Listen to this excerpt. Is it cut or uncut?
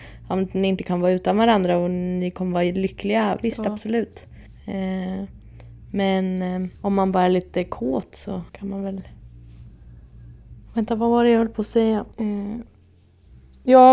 cut